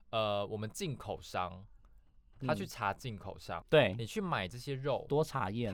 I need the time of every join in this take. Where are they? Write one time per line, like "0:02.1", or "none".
0:03.6